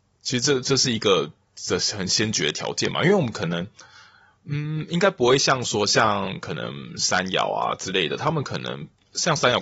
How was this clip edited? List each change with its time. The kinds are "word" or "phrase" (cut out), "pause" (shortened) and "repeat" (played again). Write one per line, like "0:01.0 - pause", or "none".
none

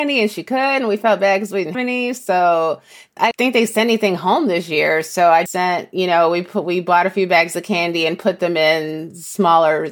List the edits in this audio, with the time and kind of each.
0:01.7 - word
0:03.3 - word
0:05.5 - word

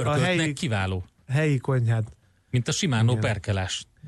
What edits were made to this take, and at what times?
none

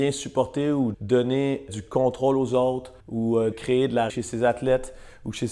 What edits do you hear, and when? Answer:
0:00.9 - word
0:01.7 - word
0:03.0 - pause
0:03.5 - word
0:04.1 - word

